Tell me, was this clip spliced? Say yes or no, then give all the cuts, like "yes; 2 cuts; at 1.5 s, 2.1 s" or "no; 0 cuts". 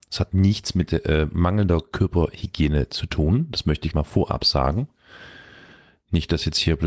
yes; 1 cut; at 3.9 s